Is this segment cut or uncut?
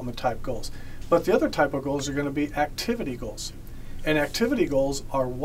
uncut